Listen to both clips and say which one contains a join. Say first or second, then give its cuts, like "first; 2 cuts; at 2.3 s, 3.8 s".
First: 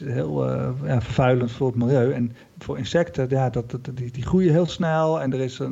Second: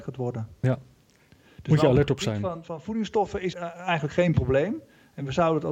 second; 2 cuts; at 2.6 s, 3.5 s